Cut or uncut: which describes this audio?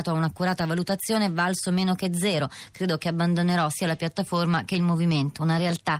uncut